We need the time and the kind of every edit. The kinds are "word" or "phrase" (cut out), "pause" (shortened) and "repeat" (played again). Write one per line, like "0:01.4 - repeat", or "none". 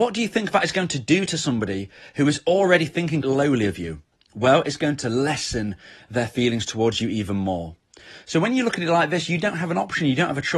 0:03.2 - word